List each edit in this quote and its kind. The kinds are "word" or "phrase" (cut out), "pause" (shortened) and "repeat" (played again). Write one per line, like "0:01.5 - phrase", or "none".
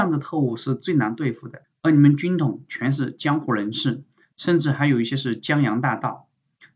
none